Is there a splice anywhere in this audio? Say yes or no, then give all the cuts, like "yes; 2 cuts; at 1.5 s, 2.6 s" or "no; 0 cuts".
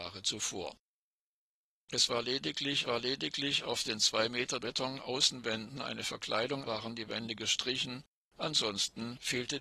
yes; 3 cuts; at 2.8 s, 4.6 s, 6.6 s